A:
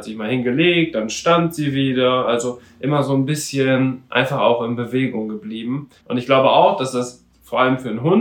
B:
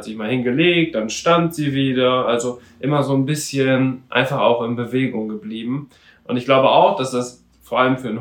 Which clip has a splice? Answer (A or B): A